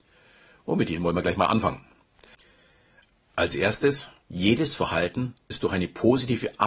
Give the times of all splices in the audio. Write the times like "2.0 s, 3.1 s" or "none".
4.2 s